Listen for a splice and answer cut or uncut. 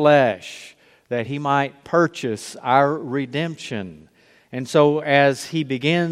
uncut